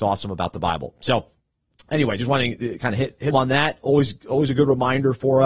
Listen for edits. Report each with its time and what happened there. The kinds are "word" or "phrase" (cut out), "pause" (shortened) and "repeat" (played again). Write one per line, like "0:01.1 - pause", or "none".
0:03.3 - word